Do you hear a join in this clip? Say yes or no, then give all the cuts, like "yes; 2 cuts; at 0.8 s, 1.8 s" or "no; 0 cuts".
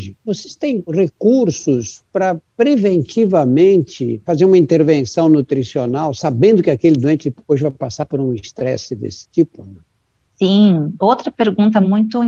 no; 0 cuts